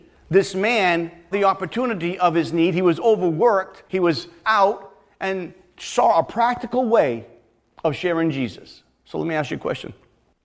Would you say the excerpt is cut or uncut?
cut